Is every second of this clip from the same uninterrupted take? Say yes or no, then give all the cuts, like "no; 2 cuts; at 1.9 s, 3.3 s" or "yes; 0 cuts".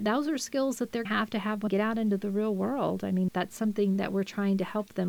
no; 3 cuts; at 1.1 s, 1.7 s, 3.3 s